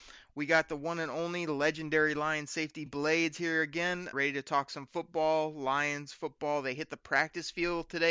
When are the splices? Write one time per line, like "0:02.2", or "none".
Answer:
0:02.9
0:04.1